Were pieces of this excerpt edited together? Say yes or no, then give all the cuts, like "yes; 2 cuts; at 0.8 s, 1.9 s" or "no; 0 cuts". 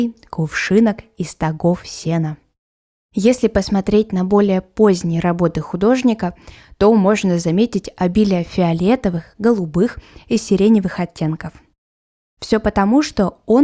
no; 0 cuts